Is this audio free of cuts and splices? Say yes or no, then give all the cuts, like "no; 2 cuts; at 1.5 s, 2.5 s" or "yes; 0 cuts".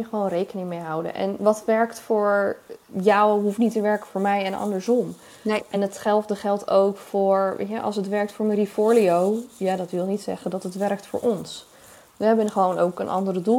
yes; 0 cuts